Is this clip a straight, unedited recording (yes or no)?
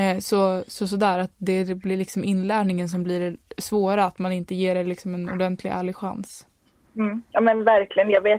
yes